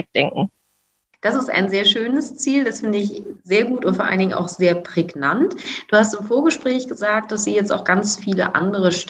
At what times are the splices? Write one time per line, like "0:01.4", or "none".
none